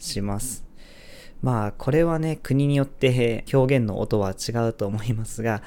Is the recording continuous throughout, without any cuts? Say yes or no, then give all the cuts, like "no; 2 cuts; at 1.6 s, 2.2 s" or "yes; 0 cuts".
no; 1 cut; at 3.5 s